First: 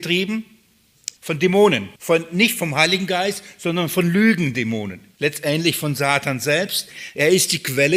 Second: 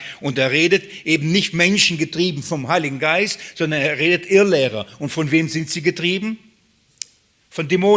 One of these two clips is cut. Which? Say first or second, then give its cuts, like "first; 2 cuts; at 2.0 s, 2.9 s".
first; 3 cuts; at 1.2 s, 2.0 s, 5.1 s